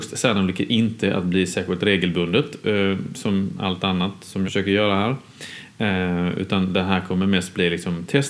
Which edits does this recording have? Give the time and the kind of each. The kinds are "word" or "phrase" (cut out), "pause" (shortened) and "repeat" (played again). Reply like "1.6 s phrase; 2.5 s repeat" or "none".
4.4 s word